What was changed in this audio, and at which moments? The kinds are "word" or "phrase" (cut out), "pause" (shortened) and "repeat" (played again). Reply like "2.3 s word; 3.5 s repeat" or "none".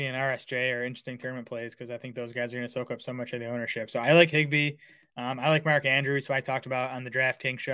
none